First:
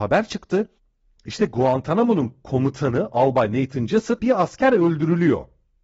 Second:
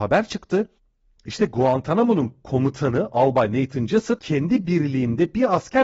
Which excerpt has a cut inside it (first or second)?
first